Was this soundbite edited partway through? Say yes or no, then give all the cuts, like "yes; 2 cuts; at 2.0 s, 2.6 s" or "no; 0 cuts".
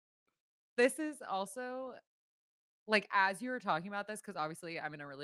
no; 0 cuts